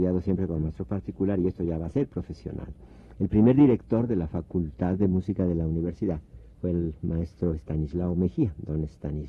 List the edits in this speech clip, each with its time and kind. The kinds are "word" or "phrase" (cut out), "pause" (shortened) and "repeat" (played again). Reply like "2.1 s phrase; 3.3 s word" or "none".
6.5 s pause